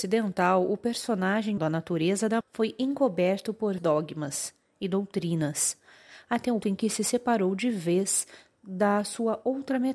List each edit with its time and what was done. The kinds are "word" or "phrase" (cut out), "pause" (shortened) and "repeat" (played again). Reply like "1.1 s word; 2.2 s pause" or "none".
1.6 s word; 2.4 s word; 3.8 s word; 6.6 s word